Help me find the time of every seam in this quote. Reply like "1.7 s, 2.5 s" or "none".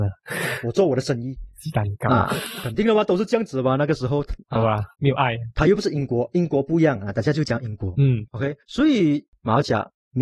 8.6 s